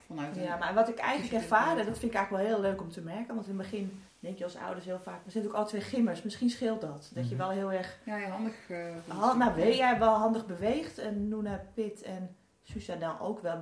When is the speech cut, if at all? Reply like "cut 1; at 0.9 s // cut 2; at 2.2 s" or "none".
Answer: cut 1; at 4.1 s